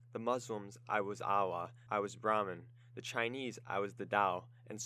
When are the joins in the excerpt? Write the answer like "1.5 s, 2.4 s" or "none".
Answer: 1.9 s